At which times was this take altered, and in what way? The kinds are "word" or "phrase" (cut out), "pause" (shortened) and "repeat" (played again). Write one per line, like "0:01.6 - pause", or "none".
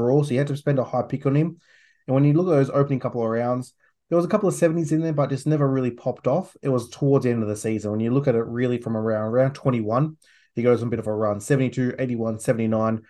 none